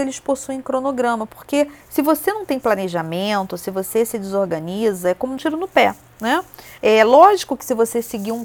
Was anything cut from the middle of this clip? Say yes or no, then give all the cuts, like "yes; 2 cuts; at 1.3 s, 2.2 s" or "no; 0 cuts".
yes; 3 cuts; at 1.8 s, 5.4 s, 6.8 s